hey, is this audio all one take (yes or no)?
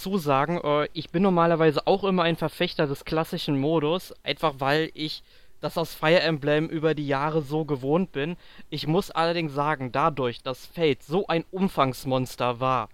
yes